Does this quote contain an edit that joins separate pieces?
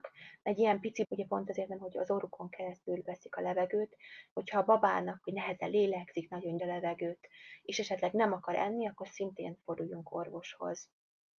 yes; 6 cuts; at 1.0 s, 1.8 s, 3.1 s, 4.3 s, 5.2 s, 6.6 s

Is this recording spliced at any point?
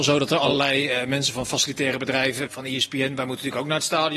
yes; 1 cut; at 2.5 s

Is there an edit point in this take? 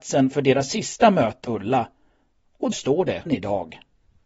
yes; 3 cuts; at 1.4 s, 2.7 s, 3.3 s

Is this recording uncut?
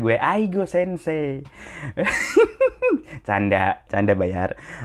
no; 1 cut; at 3.9 s

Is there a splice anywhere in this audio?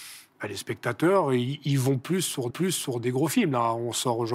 yes; 1 cut; at 2.5 s

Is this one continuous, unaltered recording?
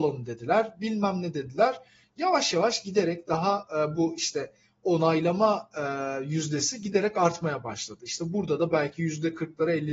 yes; 0 cuts

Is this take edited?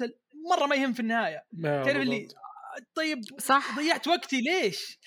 no; 0 cuts

